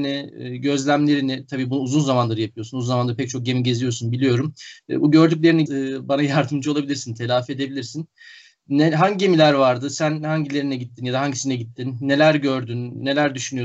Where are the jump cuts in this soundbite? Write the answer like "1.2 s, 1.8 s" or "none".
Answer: 5.7 s